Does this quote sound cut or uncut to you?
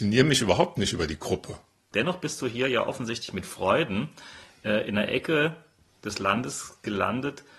uncut